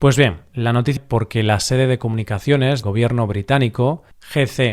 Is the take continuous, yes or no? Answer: no